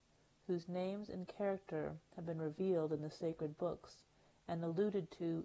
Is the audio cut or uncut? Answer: uncut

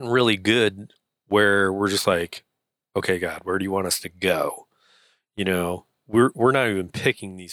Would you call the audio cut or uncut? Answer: uncut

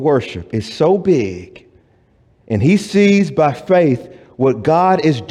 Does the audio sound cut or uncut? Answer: uncut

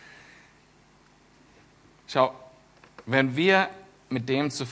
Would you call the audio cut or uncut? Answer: uncut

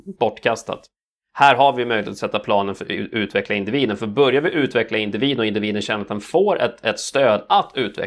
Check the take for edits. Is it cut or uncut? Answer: uncut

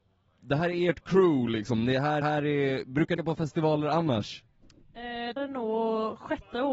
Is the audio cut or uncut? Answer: cut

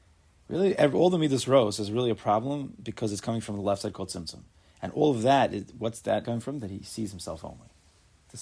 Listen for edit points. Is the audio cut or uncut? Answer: cut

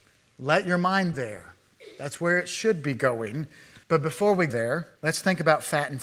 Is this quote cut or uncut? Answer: cut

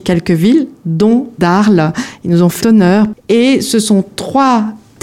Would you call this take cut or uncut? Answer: cut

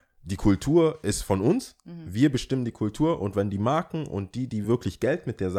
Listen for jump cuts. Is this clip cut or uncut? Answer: uncut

